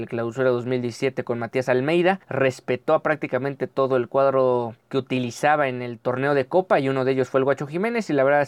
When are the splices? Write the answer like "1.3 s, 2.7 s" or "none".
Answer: 2.2 s, 4.8 s